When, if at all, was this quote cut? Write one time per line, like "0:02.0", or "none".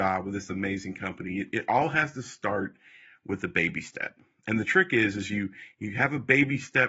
none